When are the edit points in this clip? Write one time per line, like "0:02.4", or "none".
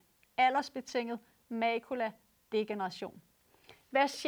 none